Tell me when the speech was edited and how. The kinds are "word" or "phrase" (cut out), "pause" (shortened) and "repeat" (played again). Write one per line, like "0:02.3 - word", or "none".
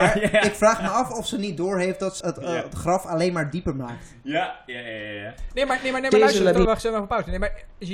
0:02.2 - word